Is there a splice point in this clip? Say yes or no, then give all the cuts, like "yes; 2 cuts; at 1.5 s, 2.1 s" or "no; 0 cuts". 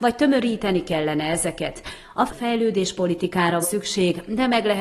yes; 2 cuts; at 2.3 s, 3.6 s